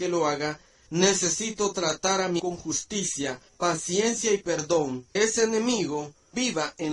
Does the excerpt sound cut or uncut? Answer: cut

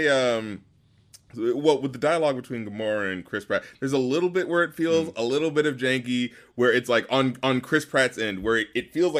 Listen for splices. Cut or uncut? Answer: uncut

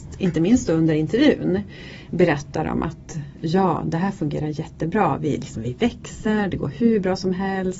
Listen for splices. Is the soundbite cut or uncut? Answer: uncut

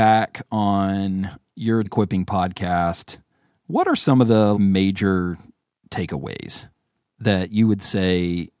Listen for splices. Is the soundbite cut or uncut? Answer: cut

